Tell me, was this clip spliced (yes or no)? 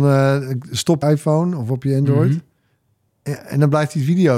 yes